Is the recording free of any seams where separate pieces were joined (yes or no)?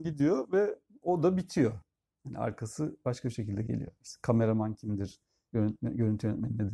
yes